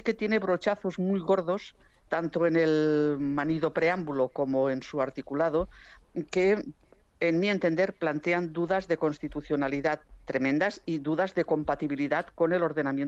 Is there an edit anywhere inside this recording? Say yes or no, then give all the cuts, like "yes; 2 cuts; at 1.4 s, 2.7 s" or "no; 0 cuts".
yes; 1 cut; at 2.1 s